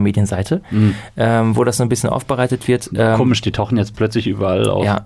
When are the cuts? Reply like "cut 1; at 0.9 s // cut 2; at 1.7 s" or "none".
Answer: none